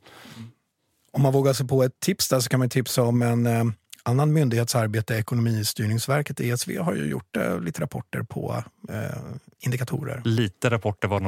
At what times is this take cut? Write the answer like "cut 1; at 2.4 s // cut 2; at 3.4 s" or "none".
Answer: none